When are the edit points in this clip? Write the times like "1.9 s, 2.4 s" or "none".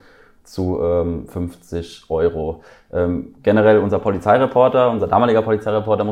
none